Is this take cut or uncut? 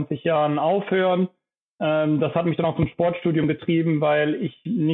uncut